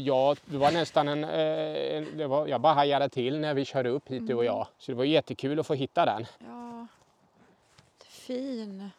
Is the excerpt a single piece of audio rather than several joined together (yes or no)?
no